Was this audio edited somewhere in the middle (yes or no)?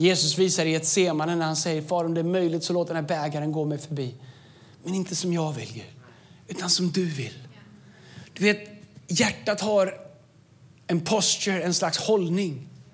no